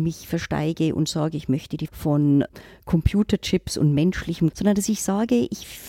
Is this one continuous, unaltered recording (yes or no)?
no